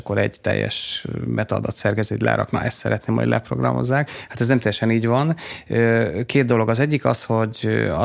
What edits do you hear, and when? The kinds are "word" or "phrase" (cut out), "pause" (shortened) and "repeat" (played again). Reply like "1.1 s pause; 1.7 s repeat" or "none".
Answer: none